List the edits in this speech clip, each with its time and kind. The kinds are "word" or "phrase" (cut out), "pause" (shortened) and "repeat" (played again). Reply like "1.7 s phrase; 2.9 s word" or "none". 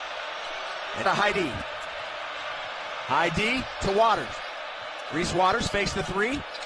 1.0 s word